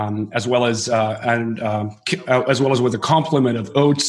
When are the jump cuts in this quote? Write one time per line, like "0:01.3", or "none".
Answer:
none